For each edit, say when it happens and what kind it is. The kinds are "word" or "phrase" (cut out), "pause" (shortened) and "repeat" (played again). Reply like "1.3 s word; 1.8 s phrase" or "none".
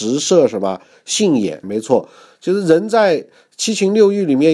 1.6 s word